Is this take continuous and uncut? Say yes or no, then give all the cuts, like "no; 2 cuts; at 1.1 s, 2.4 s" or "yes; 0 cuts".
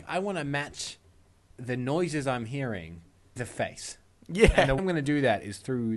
no; 2 cuts; at 3.4 s, 4.8 s